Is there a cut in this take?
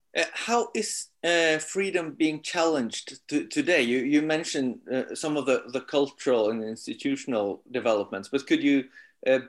yes; 1 cut; at 1.2 s

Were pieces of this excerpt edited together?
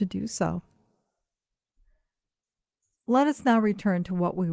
no; 0 cuts

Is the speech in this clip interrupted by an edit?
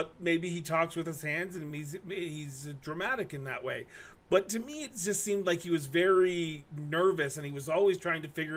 no; 0 cuts

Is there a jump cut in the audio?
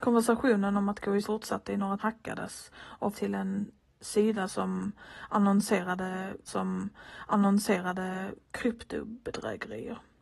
yes; 4 cuts; at 1.2 s, 2.0 s, 3.1 s, 6.5 s

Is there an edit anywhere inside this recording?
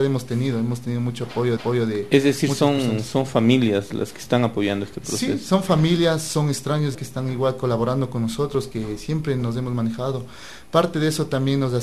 yes; 2 cuts; at 1.6 s, 6.9 s

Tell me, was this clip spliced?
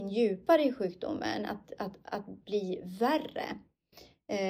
no; 0 cuts

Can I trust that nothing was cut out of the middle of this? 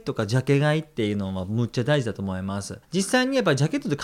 no; 1 cut; at 2.8 s

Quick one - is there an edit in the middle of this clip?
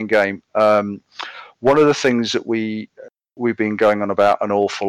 no; 0 cuts

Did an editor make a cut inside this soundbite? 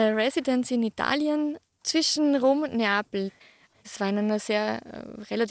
no; 0 cuts

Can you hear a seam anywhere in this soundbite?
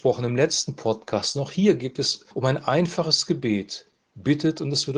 yes; 1 cut; at 2.3 s

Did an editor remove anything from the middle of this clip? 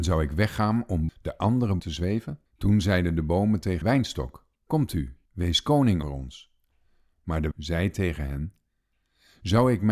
yes; 8 cuts; at 1.1 s, 1.8 s, 2.5 s, 3.8 s, 4.5 s, 5.3 s, 6.0 s, 7.5 s

